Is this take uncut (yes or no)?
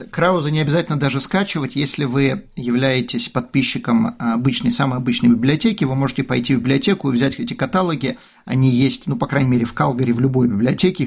yes